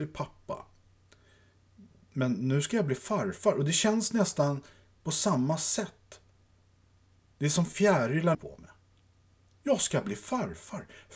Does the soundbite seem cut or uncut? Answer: cut